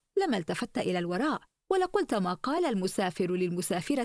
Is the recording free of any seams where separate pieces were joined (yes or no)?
yes